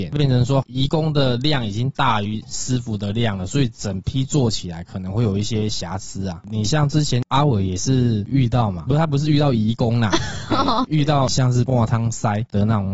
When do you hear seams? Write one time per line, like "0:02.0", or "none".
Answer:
0:08.9